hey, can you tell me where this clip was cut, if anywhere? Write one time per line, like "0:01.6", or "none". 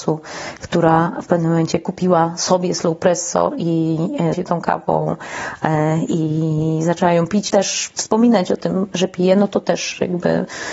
0:04.3
0:07.5
0:08.9